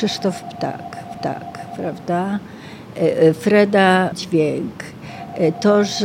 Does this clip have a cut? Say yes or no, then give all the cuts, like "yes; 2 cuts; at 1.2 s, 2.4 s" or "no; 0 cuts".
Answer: yes; 2 cuts; at 1.1 s, 4.1 s